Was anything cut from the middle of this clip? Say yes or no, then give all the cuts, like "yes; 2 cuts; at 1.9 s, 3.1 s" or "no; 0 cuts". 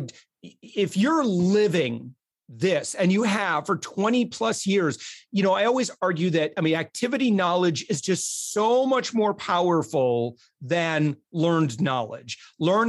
no; 0 cuts